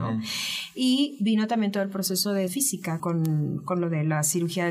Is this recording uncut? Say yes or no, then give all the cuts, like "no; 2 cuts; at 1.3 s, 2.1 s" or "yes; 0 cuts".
no; 2 cuts; at 2.5 s, 3.0 s